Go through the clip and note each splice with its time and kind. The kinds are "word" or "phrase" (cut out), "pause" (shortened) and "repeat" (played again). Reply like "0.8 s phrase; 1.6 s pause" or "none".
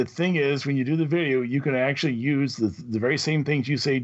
none